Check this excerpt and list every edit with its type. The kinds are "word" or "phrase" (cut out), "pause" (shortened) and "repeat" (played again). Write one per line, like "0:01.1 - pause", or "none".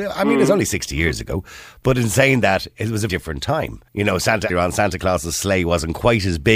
0:03.1 - word
0:03.9 - pause
0:04.5 - phrase